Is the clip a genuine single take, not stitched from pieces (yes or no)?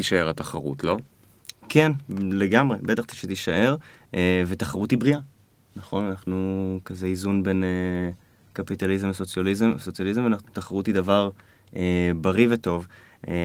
yes